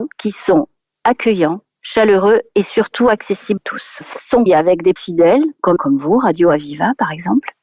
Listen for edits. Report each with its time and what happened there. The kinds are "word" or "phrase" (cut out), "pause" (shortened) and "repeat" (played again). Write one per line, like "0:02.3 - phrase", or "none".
0:03.6 - word
0:04.1 - word
0:04.5 - word
0:05.0 - word
0:05.8 - word